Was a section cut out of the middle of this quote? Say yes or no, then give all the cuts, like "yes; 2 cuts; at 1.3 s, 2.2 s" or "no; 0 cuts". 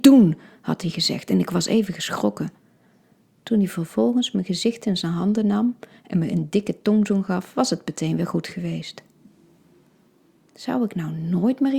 no; 0 cuts